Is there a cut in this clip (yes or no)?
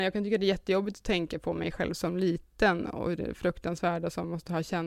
no